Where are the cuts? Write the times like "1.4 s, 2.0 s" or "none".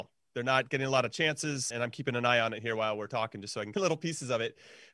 1.7 s, 3.7 s